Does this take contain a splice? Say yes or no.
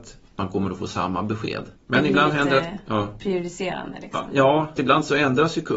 yes